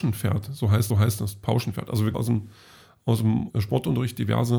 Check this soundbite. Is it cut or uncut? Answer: cut